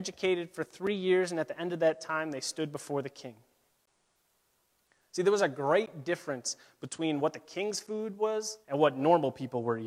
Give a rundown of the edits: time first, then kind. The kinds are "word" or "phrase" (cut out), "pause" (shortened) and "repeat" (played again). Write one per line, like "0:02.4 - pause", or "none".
0:08.6 - pause